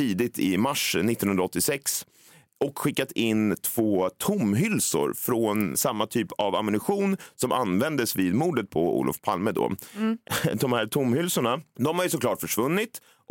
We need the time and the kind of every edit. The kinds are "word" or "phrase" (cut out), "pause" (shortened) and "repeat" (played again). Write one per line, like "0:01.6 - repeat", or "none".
0:05.7 - word